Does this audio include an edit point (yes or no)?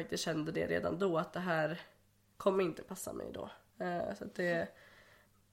no